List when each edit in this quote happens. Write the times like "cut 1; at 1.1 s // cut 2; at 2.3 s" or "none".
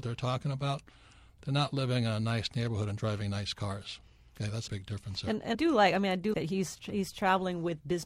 cut 1; at 4.7 s // cut 2; at 5.5 s // cut 3; at 6.3 s